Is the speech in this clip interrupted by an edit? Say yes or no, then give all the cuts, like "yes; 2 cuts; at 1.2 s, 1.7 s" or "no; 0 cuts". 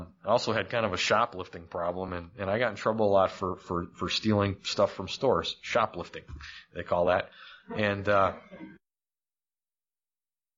no; 0 cuts